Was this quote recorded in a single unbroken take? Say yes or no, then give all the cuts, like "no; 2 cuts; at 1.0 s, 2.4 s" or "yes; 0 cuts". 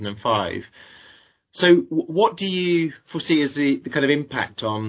yes; 0 cuts